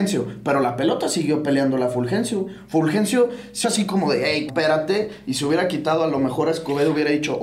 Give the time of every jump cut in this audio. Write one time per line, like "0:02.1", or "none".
0:03.6
0:04.5